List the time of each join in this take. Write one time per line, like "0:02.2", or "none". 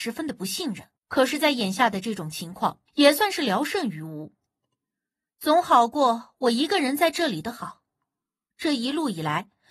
0:01.0
0:02.9